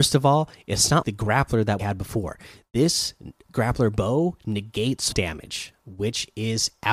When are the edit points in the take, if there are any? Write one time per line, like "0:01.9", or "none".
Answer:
0:01.0
0:01.8
0:05.1